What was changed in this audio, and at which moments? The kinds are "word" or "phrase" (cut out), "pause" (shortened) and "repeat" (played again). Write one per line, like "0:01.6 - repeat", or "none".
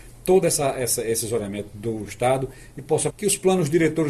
0:03.1 - word

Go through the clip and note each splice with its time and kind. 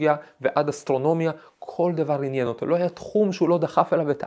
none

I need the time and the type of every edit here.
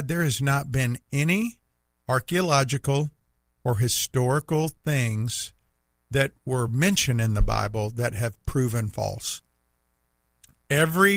none

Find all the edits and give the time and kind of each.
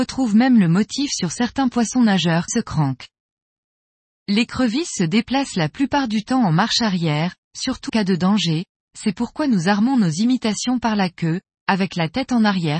0:02.5 - word
0:07.9 - word

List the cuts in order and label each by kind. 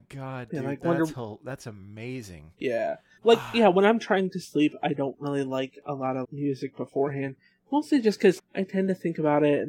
0:03.2 - word
0:06.2 - word
0:08.4 - word

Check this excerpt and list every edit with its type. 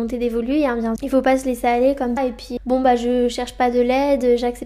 0:01.0 - word
0:02.2 - word
0:02.6 - word

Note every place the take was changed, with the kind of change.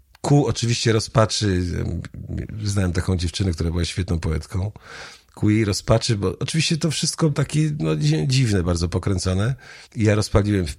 0:07.3 - word
0:09.9 - pause

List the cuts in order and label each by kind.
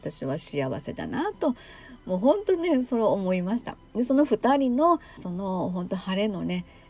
0:05.2 - phrase

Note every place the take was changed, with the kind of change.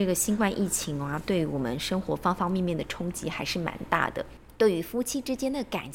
none

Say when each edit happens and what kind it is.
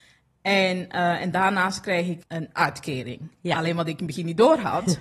0:02.2 - word

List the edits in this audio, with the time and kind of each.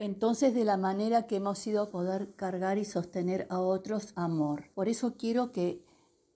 0:01.9 - phrase
0:04.1 - word
0:04.7 - pause

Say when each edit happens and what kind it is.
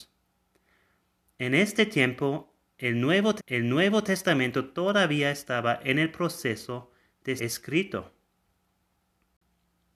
0:03.4 - repeat
0:07.4 - word

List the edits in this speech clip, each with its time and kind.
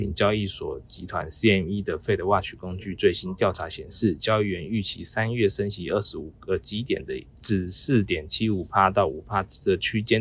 0:07.4 - pause

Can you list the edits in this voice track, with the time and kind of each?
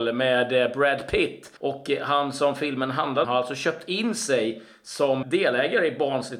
0:01.6 - pause
0:03.2 - phrase
0:05.2 - word

